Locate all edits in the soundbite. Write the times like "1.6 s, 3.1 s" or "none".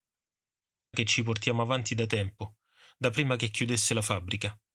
0.9 s